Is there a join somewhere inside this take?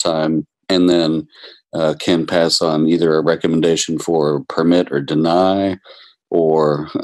no; 0 cuts

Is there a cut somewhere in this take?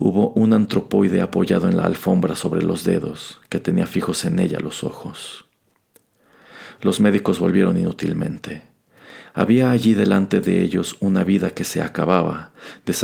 no; 0 cuts

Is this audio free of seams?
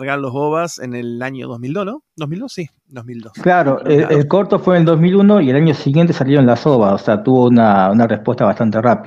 yes; 0 cuts

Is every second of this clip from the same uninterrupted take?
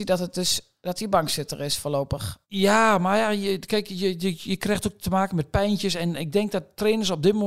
no; 1 cut; at 2.4 s

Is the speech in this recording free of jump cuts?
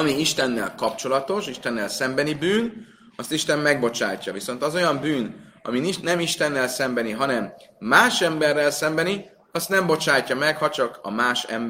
yes; 0 cuts

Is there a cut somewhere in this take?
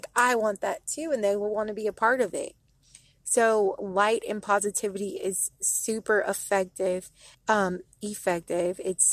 yes; 1 cut; at 7.3 s

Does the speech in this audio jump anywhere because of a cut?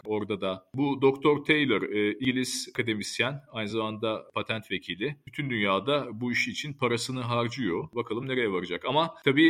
no; 0 cuts

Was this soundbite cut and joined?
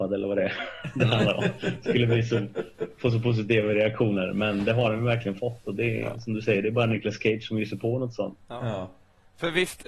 no; 0 cuts

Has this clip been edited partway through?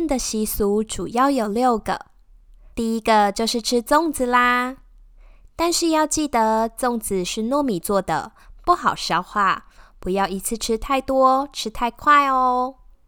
yes; 1 cut; at 2.7 s

